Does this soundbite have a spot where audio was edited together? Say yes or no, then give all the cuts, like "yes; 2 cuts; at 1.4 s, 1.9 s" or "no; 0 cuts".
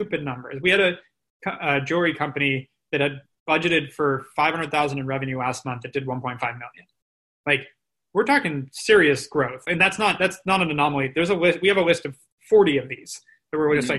no; 0 cuts